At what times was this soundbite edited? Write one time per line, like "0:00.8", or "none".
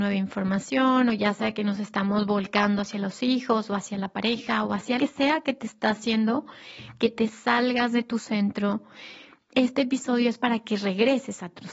0:05.0